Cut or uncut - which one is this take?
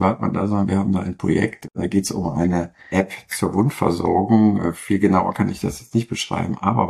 uncut